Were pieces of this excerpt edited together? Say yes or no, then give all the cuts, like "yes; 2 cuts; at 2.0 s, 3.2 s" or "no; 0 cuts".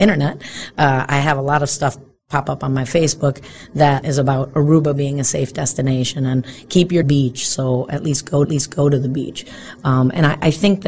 yes; 3 cuts; at 4.0 s, 7.0 s, 8.4 s